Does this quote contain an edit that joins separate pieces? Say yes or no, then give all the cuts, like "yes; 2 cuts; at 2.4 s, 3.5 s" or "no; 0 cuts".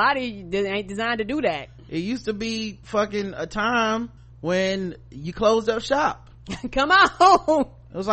yes; 3 cuts; at 2.8 s, 4.2 s, 6.4 s